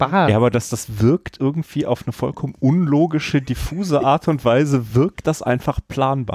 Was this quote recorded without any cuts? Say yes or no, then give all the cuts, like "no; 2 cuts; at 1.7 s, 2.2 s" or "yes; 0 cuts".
yes; 0 cuts